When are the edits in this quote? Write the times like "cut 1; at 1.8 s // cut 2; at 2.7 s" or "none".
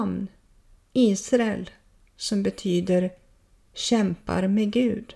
none